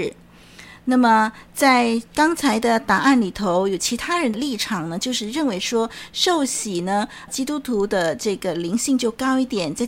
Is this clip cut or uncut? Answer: cut